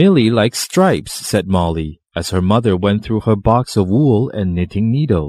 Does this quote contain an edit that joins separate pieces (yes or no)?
yes